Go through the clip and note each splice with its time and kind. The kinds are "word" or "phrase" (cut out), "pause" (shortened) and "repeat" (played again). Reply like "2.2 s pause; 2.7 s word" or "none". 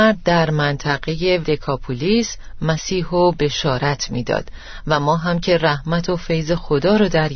1.4 s word